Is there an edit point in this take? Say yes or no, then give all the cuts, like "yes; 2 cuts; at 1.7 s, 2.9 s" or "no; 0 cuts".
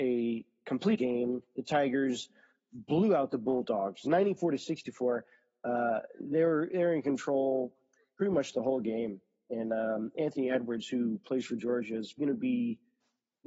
yes; 2 cuts; at 1.0 s, 12.2 s